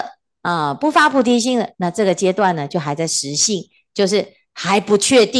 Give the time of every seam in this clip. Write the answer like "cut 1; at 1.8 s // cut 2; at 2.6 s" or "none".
cut 1; at 1.7 s